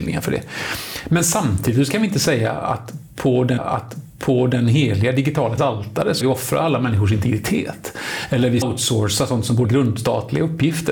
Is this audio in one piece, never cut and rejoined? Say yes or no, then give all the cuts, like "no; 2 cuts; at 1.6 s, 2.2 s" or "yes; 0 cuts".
no; 5 cuts; at 3.6 s, 5.6 s, 6.2 s, 8.6 s, 9.6 s